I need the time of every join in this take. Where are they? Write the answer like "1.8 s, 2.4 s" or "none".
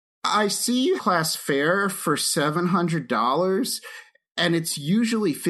1.0 s